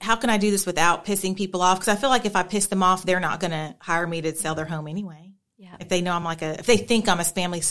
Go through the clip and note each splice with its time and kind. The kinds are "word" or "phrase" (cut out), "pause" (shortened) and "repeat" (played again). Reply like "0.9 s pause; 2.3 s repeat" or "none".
none